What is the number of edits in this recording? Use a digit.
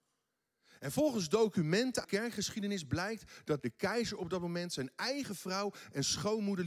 2